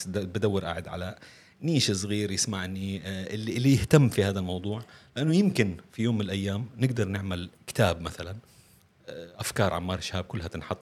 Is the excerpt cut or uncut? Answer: uncut